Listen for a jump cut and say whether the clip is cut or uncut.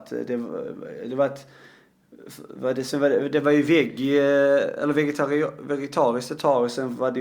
uncut